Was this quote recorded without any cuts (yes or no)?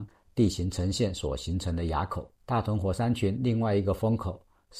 no